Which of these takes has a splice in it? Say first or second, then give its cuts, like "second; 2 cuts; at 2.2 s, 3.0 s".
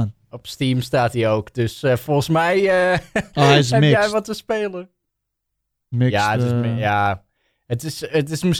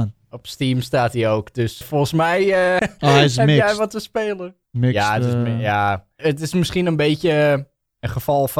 second; 4 cuts; at 1.8 s, 2.8 s, 4.6 s, 6.2 s